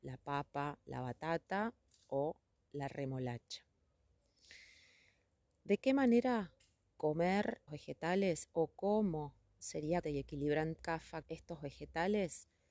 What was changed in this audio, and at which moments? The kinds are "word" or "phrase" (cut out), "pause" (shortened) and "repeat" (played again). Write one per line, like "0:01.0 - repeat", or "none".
0:07.7 - word
0:10.0 - word
0:10.8 - word
0:11.2 - word

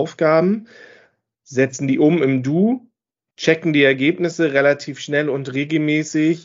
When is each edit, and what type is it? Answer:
none

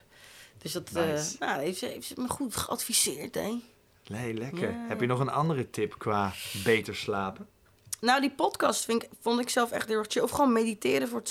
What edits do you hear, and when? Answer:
none

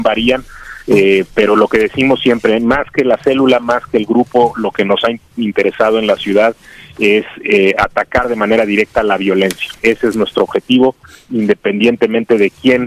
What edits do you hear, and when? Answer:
none

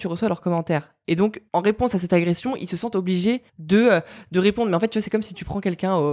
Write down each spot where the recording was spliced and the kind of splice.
0:01.5 - pause
0:03.5 - pause

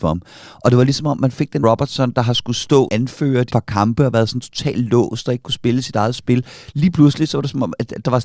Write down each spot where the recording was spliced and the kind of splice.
0:01.6 - word
0:02.9 - word
0:03.5 - word

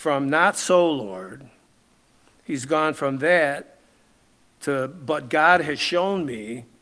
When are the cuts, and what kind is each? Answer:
none

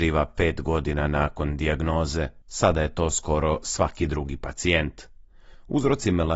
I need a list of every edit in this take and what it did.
0:02.4 - pause

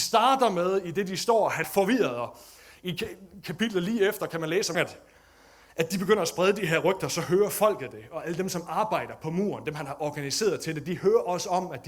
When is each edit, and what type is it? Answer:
0:01.6 - word
0:04.7 - phrase

